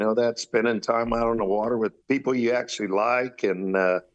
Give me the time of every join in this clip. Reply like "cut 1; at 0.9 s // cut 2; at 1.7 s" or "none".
cut 1; at 2.0 s